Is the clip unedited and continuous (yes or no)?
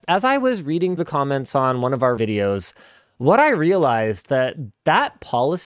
no